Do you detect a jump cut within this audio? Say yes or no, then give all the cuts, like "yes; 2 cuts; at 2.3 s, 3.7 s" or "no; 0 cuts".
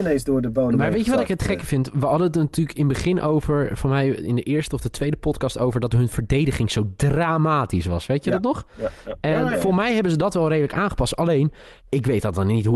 yes; 2 cuts; at 9.5 s, 11.8 s